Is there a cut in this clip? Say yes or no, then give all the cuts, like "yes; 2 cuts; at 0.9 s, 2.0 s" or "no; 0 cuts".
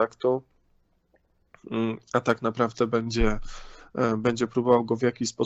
no; 0 cuts